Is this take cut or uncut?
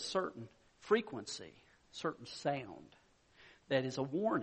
uncut